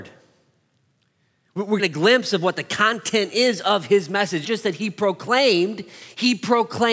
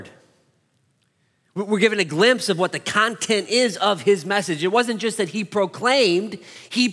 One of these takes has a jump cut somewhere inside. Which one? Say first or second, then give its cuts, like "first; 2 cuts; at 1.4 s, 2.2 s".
first; 2 cuts; at 1.8 s, 4.4 s